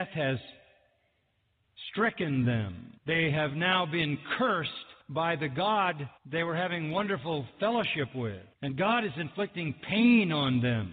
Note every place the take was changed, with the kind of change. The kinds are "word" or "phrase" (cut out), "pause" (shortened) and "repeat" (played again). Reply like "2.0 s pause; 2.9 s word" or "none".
3.0 s pause; 5.0 s pause; 6.2 s pause; 8.5 s pause